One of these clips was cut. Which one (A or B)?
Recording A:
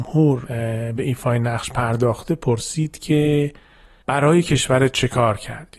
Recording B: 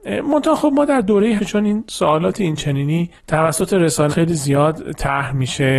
B